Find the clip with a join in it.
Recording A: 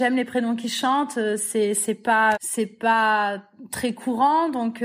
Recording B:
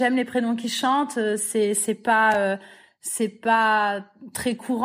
A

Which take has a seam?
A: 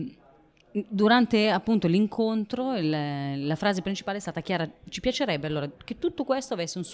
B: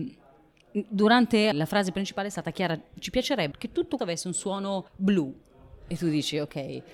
B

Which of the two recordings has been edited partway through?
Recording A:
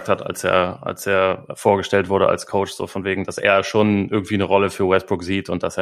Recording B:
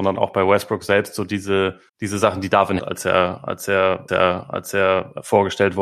B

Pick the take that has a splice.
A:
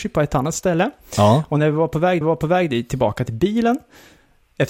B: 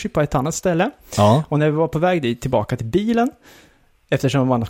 A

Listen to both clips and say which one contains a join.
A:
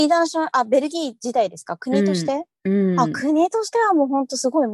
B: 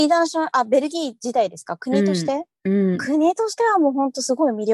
B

